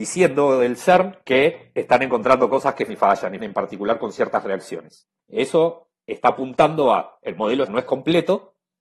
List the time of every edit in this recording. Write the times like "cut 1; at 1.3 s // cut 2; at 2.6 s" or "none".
cut 1; at 2.9 s // cut 2; at 3.4 s // cut 3; at 5.2 s // cut 4; at 7.7 s